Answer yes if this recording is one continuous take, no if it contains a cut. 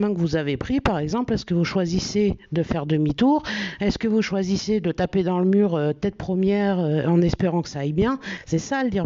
yes